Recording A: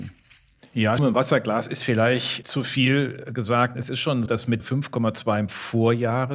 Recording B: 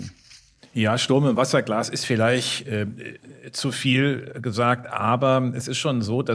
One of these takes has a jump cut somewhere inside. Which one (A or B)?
A